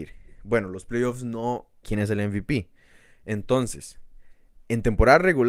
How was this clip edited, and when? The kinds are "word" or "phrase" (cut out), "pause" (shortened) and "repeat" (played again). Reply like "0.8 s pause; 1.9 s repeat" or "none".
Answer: 1.8 s word